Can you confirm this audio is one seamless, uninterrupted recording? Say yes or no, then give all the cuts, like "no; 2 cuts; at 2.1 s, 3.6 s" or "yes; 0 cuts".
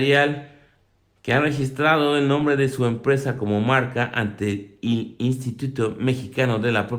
yes; 0 cuts